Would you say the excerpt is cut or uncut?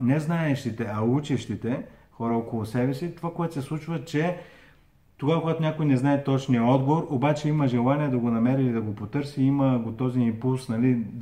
uncut